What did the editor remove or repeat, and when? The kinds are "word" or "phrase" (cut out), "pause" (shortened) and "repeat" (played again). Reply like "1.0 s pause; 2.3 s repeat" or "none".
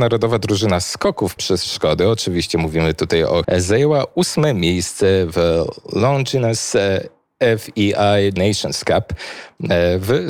1.4 s word; 3.4 s word; 8.4 s word